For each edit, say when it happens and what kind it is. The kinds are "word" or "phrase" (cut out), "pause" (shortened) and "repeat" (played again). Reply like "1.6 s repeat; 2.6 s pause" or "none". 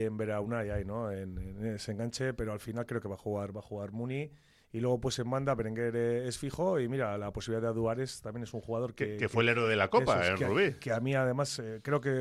2.4 s word